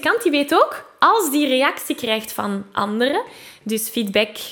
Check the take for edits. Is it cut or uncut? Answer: uncut